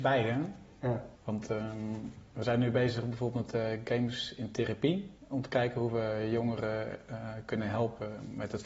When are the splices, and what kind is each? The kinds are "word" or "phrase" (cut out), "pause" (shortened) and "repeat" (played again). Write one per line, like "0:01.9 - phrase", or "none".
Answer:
0:01.1 - pause
0:05.2 - pause